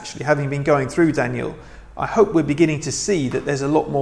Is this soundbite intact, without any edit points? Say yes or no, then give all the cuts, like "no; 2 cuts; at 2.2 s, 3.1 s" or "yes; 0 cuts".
yes; 0 cuts